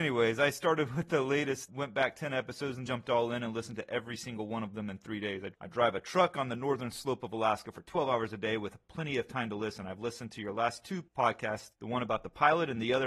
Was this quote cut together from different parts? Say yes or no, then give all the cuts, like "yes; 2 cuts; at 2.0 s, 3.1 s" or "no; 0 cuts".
yes; 2 cuts; at 2.9 s, 11.1 s